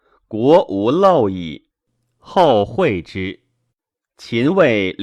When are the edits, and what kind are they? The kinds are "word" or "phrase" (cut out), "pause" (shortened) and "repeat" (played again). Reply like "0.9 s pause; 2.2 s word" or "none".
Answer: 1.7 s pause

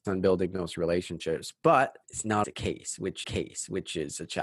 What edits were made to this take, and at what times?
2.0 s pause; 2.4 s word; 3.2 s repeat

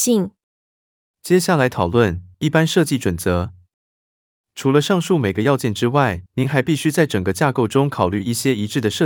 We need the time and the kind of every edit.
2.3 s pause; 6.3 s pause

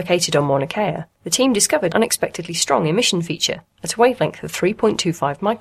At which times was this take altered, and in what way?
1.1 s pause; 1.9 s word

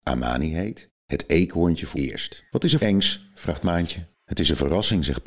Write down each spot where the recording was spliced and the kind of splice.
1.9 s word; 2.5 s pause; 2.8 s word; 4.1 s pause

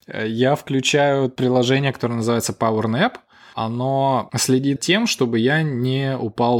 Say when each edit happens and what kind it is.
4.8 s word

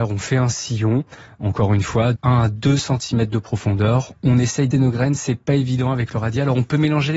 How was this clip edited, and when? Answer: 2.2 s word; 4.7 s word

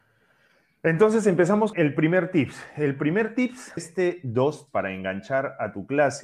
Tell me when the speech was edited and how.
1.7 s word; 3.8 s word; 4.7 s word

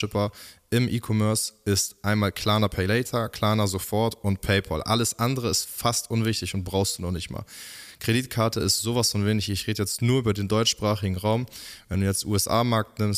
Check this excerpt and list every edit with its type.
none

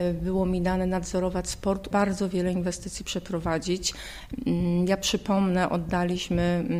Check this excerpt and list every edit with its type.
1.9 s phrase

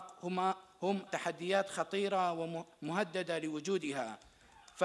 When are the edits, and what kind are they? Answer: 1.1 s word

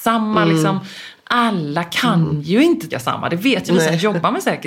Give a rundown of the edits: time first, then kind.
2.9 s word

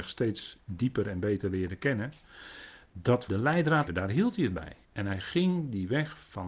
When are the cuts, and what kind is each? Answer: 3.3 s word; 3.9 s phrase; 4.8 s pause

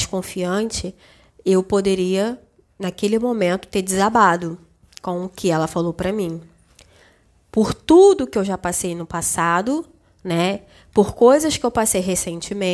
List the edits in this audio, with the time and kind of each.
none

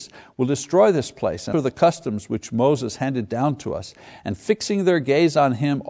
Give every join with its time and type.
1.5 s word

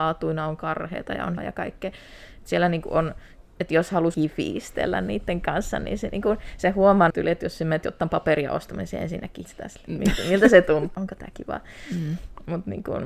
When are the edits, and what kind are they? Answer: 1.4 s word; 4.1 s word; 7.1 s word; 9.4 s word; 10.9 s word

